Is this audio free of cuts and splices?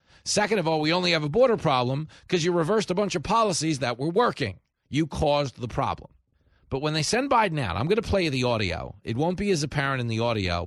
no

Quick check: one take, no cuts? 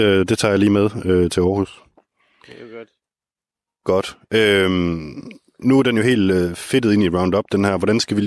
yes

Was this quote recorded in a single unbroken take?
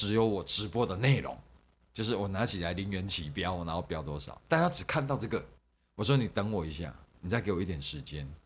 no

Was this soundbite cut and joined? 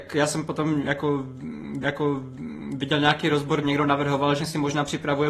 yes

